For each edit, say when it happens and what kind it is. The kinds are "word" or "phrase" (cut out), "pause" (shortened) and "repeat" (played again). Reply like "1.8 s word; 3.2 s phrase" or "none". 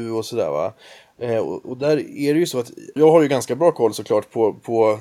1.6 s word; 3.0 s word